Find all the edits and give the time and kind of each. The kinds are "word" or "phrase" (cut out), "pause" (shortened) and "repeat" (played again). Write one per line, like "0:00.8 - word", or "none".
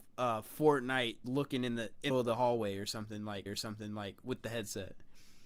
0:01.2 - word
0:02.1 - phrase
0:03.5 - repeat

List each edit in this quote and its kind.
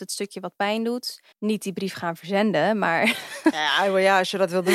0:01.3 - pause

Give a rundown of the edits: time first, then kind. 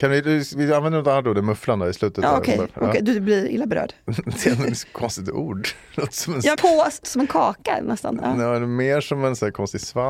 0:06.5 - phrase
0:07.0 - word

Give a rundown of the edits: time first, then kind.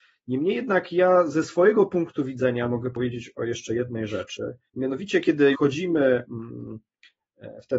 0:04.7 - pause
0:05.5 - word

